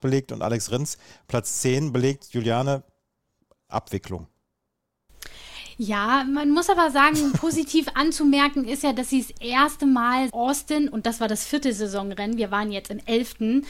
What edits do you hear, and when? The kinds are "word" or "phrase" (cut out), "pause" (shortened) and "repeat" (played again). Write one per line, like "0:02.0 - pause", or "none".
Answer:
0:10.3 - word